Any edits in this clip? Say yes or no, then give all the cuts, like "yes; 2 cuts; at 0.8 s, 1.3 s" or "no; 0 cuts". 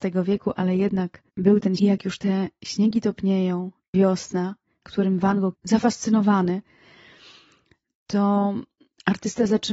yes; 5 cuts; at 1.3 s, 1.8 s, 3.9 s, 4.8 s, 5.5 s